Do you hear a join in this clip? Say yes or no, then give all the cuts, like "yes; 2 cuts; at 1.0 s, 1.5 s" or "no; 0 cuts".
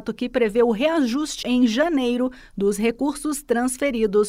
yes; 1 cut; at 1.4 s